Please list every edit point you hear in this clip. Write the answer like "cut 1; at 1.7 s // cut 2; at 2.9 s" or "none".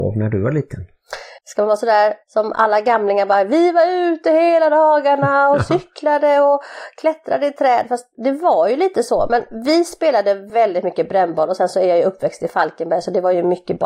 cut 1; at 1.4 s // cut 2; at 2.2 s